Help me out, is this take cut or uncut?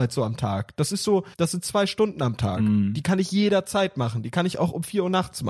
cut